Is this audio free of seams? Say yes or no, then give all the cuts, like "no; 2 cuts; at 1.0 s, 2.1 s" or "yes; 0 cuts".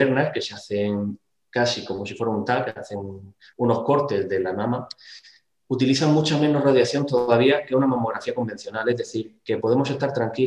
yes; 0 cuts